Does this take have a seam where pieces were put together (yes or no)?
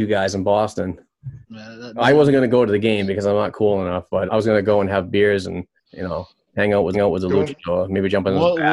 yes